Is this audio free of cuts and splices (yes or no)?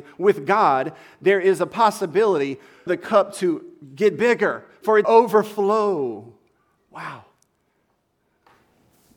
no